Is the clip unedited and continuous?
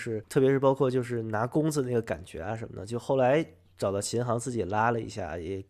yes; 0 cuts

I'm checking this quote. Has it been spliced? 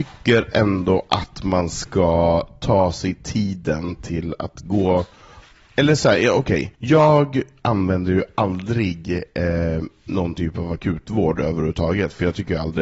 yes; 2 cuts; at 5.5 s, 6.7 s

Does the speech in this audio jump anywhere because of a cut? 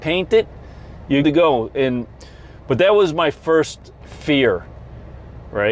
yes; 2 cuts; at 1.2 s, 4.0 s

